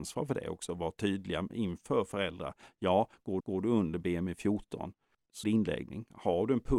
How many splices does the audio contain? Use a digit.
2